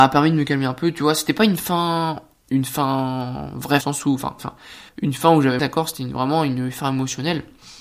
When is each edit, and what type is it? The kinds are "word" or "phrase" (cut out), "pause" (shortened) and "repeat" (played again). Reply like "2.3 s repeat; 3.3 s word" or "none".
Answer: 3.8 s phrase; 4.4 s phrase; 4.9 s pause; 5.6 s phrase